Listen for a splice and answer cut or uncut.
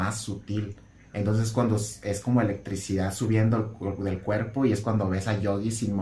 uncut